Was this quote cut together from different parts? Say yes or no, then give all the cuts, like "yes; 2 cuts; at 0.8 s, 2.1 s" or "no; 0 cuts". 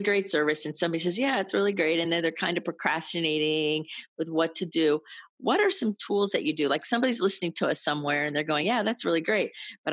no; 0 cuts